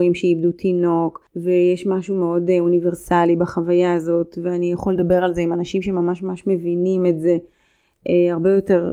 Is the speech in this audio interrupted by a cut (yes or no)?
yes